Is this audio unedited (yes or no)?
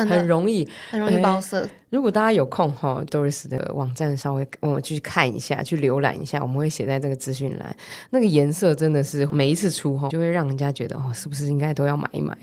no